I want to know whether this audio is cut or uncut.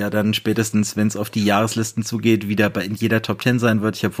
uncut